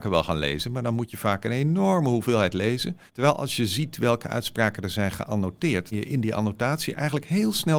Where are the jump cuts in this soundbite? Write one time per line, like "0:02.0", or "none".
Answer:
0:03.1
0:05.9